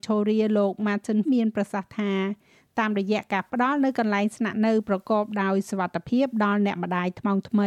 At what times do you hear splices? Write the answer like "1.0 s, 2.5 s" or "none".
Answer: 1.3 s